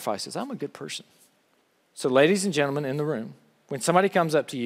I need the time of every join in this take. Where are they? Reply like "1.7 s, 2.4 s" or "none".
1.6 s